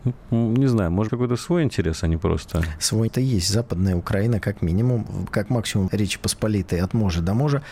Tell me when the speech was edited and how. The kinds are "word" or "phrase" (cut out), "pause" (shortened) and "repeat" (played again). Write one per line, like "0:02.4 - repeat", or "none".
0:01.1 - phrase
0:03.1 - word
0:05.9 - word